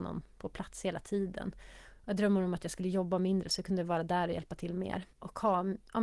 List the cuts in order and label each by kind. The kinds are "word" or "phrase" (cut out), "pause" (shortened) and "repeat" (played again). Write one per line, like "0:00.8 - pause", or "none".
0:05.1 - pause